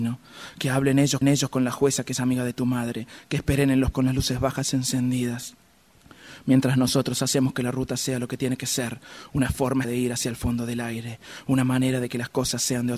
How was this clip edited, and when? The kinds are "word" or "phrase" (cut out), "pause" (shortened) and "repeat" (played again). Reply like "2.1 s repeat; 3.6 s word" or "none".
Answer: 1.2 s repeat; 3.9 s word; 9.8 s word